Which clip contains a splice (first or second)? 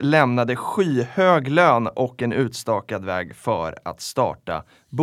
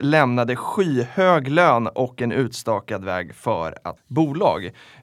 second